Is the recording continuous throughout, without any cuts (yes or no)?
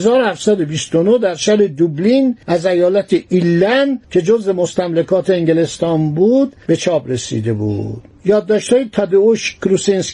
no